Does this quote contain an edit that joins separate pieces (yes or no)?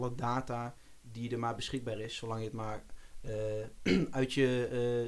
no